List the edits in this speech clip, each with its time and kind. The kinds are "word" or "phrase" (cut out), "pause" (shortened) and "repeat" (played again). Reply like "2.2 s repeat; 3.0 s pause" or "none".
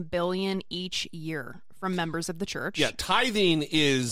none